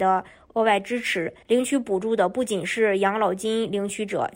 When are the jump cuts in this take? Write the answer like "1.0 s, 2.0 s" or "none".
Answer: 1.4 s